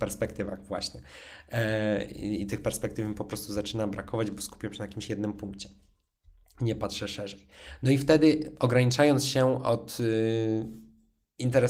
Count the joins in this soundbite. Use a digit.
0